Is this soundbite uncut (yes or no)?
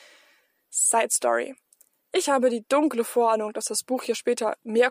yes